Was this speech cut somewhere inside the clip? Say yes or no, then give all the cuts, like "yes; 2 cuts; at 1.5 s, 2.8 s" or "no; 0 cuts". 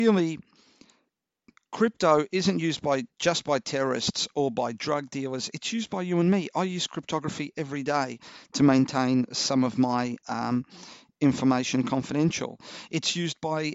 no; 0 cuts